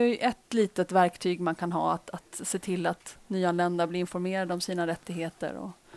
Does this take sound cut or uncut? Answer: uncut